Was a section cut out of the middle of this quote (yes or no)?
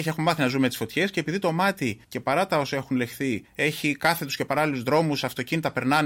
yes